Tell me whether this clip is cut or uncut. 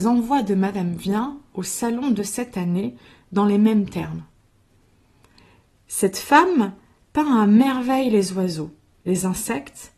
uncut